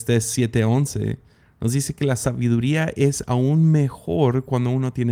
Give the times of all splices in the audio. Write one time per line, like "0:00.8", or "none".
none